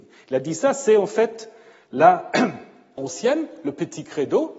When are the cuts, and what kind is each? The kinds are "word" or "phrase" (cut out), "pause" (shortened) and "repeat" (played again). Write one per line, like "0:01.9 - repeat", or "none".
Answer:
0:03.0 - word